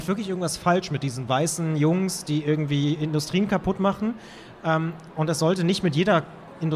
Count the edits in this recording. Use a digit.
0